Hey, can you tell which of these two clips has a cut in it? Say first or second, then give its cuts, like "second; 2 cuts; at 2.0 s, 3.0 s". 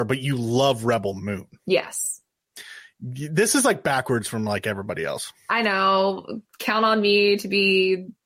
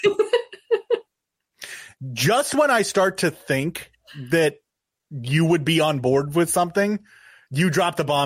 first; 2 cuts; at 1.6 s, 6.5 s